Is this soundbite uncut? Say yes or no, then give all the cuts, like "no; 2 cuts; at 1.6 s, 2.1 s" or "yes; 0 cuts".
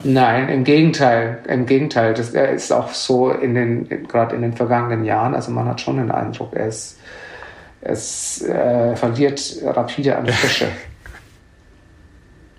no; 1 cut; at 9.0 s